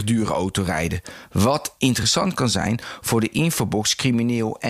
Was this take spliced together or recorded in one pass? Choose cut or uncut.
uncut